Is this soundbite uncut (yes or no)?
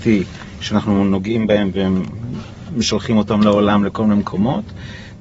yes